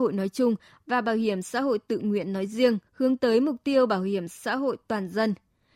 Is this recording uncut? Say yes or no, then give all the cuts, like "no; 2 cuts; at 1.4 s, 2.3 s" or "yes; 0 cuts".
no; 1 cut; at 2.9 s